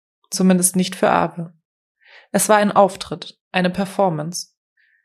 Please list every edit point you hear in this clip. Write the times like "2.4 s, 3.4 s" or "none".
none